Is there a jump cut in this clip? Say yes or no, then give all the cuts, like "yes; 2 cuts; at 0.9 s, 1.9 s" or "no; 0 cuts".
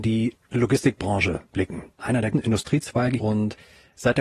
yes; 3 cuts; at 1.9 s, 2.3 s, 3.2 s